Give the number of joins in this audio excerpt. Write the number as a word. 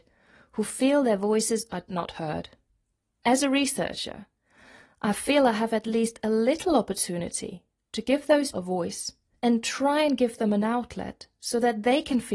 three